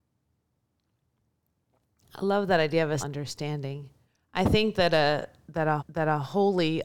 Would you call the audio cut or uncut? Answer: cut